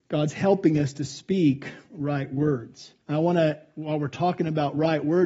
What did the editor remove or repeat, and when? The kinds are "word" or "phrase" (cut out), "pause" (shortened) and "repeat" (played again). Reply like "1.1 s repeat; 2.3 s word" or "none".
3.0 s pause